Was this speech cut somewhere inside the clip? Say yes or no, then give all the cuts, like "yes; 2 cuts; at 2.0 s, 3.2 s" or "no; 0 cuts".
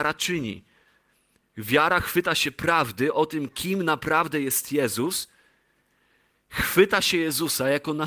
no; 0 cuts